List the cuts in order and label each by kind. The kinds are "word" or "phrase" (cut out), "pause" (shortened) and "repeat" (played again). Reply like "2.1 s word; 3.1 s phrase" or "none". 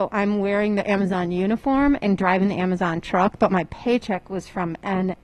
none